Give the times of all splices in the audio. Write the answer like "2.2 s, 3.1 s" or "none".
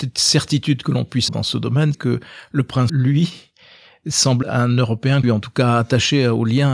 1.3 s, 1.9 s, 2.9 s, 4.4 s, 5.2 s

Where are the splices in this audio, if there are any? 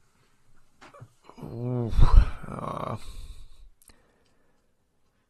1.2 s

